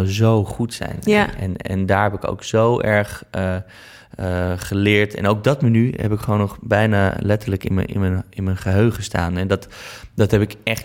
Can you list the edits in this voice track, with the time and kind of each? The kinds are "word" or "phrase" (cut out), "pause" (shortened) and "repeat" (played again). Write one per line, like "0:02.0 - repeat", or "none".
none